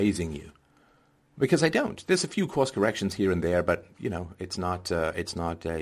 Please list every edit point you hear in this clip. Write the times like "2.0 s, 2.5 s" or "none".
none